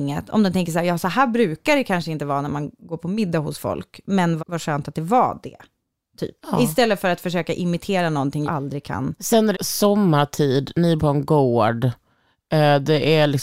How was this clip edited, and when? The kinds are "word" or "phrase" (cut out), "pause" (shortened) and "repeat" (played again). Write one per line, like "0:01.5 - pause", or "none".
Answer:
0:04.4 - word
0:06.4 - pause
0:08.4 - word
0:09.5 - phrase
0:11.0 - word